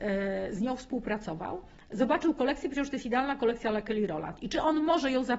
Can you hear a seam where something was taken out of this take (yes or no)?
no